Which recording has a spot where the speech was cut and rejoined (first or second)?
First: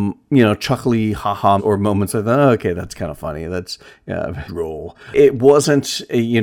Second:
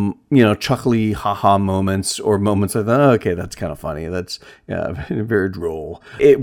first